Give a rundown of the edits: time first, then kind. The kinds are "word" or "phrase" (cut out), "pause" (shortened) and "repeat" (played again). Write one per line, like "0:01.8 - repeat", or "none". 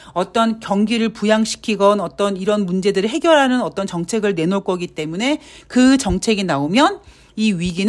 none